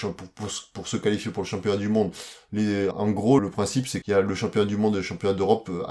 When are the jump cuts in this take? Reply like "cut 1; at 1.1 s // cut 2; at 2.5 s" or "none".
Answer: cut 1; at 2.9 s // cut 2; at 3.4 s // cut 3; at 4.0 s